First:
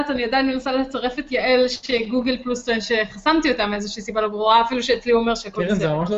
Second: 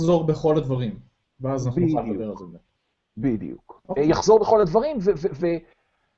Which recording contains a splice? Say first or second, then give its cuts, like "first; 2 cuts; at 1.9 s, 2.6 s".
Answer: second; 1 cut; at 3.8 s